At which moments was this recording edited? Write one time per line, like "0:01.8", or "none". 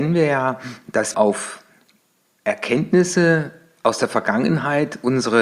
0:01.1